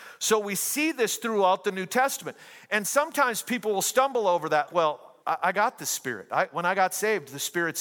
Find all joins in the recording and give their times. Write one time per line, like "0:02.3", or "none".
0:04.7
0:05.2